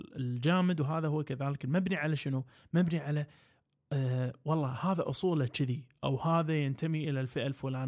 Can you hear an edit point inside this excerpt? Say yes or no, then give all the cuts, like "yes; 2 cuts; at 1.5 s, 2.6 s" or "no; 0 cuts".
no; 0 cuts